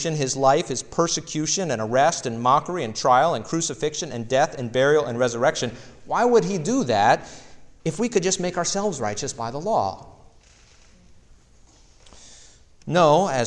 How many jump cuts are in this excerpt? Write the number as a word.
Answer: zero